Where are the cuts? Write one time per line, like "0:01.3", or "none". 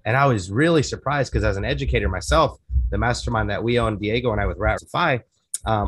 0:04.8